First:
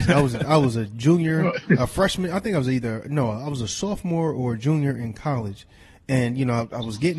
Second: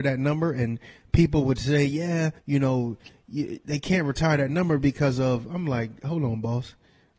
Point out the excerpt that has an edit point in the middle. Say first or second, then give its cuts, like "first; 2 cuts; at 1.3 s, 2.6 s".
second; 1 cut; at 2.4 s